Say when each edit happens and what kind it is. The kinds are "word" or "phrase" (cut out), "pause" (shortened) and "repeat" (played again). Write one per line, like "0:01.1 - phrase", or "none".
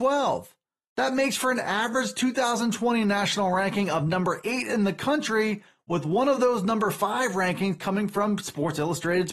none